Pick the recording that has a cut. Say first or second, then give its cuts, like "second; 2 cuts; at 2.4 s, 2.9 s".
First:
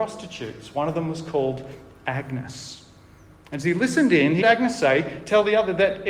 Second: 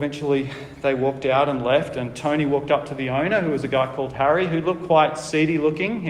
first; 1 cut; at 4.4 s